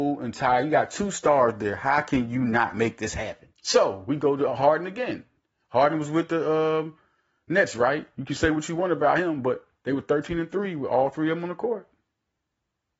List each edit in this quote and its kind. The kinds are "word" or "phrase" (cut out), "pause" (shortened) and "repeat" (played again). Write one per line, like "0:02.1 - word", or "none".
0:03.5 - pause